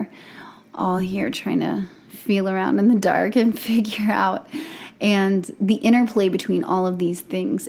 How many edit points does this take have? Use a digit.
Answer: 0